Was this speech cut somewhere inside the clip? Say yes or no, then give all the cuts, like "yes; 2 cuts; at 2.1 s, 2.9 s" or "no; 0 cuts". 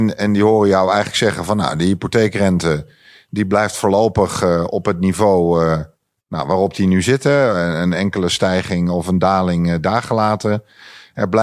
no; 0 cuts